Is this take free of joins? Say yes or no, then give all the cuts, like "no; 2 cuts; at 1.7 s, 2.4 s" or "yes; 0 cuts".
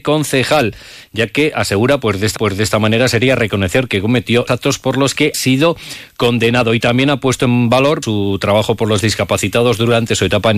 no; 4 cuts; at 2.4 s, 4.5 s, 5.3 s, 8.0 s